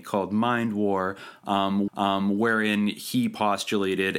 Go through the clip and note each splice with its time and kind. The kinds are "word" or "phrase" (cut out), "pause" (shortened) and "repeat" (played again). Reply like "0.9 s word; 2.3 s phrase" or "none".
1.9 s repeat